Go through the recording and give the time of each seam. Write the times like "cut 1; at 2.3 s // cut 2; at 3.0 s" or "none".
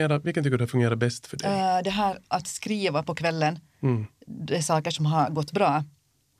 cut 1; at 4.2 s